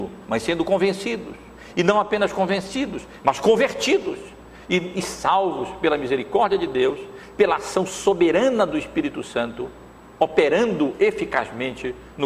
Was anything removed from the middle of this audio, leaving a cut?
no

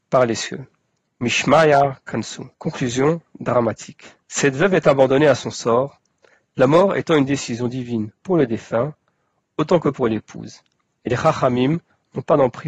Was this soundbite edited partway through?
yes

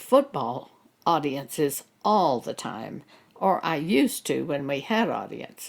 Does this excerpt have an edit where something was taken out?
no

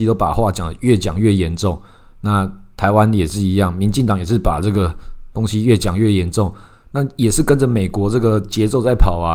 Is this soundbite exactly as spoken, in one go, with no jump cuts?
yes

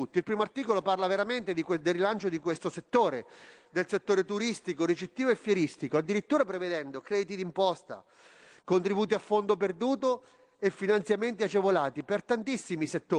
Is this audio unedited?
yes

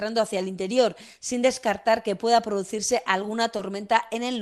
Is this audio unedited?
yes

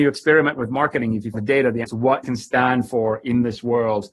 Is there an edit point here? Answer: yes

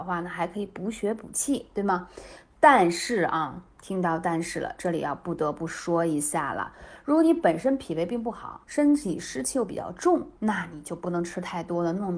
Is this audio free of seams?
no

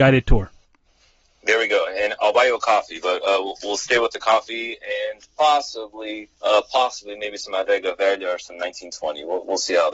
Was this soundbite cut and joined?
yes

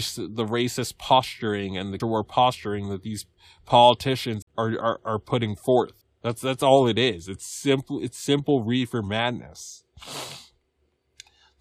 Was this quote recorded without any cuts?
no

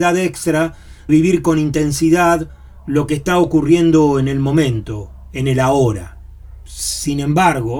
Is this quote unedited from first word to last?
no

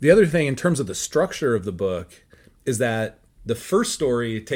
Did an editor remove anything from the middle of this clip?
no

